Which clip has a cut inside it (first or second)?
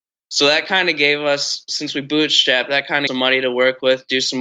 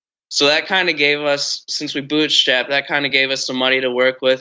first